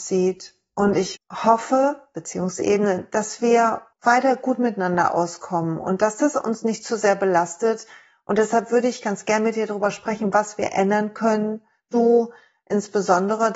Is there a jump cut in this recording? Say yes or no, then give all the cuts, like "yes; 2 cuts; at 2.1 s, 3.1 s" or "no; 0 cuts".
yes; 2 cuts; at 1.2 s, 3.9 s